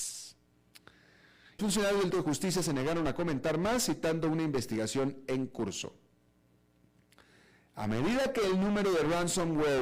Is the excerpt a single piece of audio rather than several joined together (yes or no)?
no